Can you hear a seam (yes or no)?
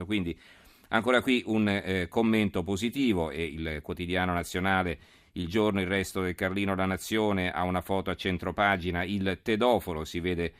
no